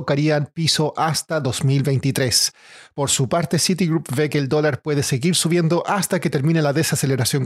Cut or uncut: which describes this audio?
uncut